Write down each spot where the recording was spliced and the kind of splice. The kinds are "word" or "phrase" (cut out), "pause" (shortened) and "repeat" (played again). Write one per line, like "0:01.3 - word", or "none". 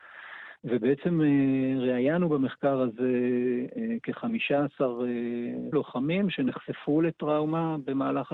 0:05.7 - word